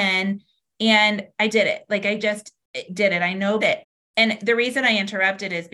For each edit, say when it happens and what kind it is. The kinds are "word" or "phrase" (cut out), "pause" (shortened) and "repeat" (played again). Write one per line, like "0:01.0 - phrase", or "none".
0:01.5 - word
0:02.9 - word
0:03.6 - phrase

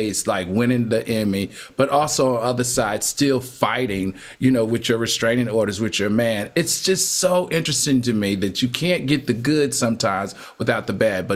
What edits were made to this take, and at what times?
none

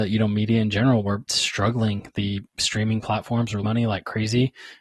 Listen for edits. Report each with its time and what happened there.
0:01.3 - word
0:03.6 - word

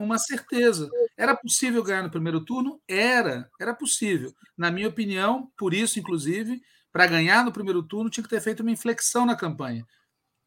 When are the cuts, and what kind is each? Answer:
none

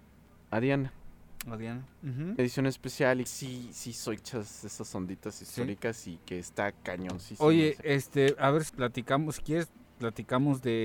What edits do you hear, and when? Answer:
0:02.4 - phrase
0:03.3 - phrase
0:04.2 - phrase
0:06.7 - pause
0:07.8 - word
0:08.7 - word

